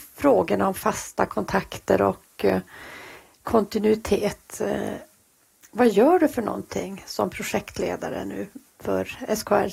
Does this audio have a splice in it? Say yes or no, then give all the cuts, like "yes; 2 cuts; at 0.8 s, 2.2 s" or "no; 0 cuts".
no; 0 cuts